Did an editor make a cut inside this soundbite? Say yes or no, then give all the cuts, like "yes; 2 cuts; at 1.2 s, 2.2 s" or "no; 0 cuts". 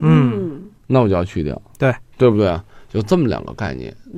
no; 0 cuts